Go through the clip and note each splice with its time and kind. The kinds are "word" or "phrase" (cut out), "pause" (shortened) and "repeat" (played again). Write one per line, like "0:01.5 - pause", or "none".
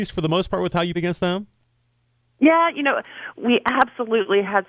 0:00.9 - word
0:03.3 - word